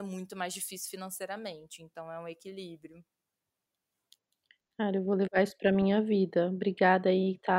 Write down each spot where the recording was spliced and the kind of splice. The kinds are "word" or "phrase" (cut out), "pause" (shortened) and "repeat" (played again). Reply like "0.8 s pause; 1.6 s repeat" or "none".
none